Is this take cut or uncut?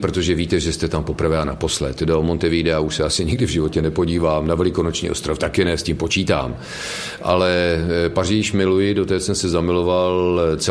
uncut